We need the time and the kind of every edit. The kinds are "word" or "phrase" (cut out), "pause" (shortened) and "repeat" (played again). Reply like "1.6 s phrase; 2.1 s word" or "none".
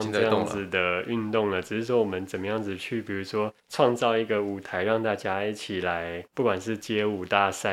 3.6 s pause; 6.3 s pause